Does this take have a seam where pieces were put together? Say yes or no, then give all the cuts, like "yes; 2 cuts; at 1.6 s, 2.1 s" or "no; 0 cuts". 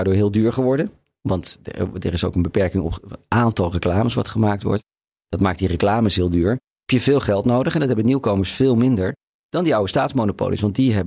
no; 0 cuts